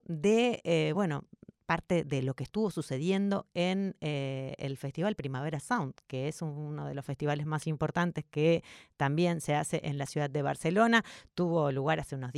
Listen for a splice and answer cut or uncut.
uncut